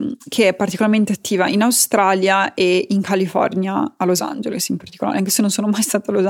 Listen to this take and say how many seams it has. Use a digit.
0